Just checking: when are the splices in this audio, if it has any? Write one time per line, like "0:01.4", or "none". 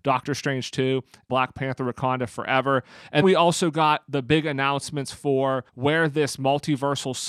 0:01.3
0:03.2
0:05.7